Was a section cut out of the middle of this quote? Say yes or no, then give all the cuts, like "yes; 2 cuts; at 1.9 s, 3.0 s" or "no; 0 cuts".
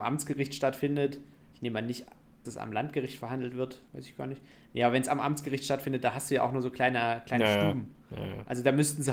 yes; 2 cuts; at 2.5 s, 3.9 s